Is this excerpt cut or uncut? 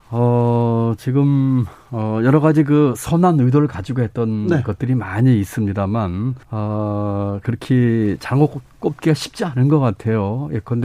cut